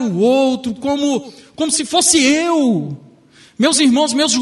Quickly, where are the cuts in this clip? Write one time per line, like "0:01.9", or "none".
none